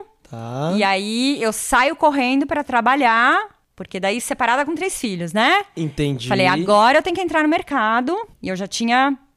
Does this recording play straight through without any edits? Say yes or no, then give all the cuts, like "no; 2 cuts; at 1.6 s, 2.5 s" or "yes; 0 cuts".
no; 2 cuts; at 3.6 s, 8.3 s